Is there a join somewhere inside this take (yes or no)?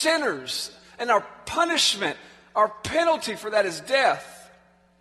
no